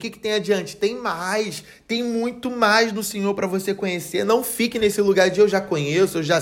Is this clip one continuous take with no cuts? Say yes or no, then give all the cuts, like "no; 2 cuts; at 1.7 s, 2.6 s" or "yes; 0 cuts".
yes; 0 cuts